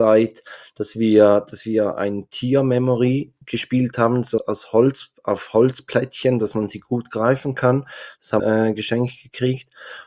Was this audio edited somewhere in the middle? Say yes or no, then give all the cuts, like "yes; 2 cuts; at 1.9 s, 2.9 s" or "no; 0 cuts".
yes; 3 cuts; at 3.4 s, 4.4 s, 8.4 s